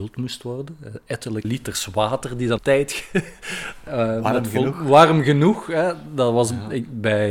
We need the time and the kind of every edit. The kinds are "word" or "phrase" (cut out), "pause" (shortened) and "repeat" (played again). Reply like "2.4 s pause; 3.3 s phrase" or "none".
1.4 s word; 2.6 s word; 3.9 s word